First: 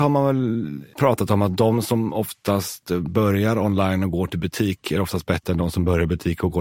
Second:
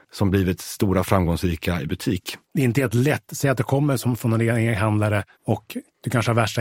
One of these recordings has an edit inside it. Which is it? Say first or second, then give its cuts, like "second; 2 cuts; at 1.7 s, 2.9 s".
second; 2 cuts; at 2.4 s, 5.3 s